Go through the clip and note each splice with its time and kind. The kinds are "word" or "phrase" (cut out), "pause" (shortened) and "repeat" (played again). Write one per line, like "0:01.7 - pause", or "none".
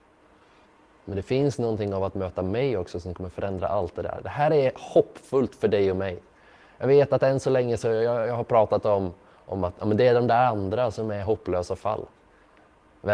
none